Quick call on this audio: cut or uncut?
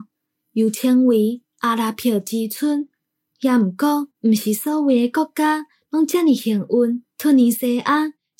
cut